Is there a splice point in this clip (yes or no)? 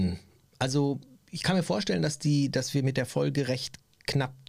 no